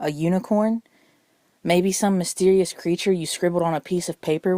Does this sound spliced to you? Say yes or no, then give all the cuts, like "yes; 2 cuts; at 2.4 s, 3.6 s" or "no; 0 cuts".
no; 0 cuts